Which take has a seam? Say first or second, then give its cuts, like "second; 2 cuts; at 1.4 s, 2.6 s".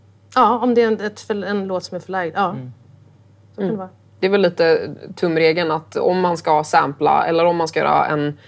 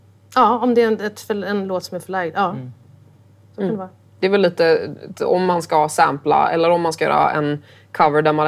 second; 1 cut; at 5.1 s